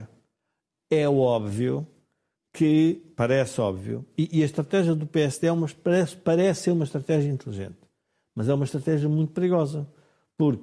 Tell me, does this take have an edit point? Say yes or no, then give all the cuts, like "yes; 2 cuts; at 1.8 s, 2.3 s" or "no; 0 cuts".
no; 0 cuts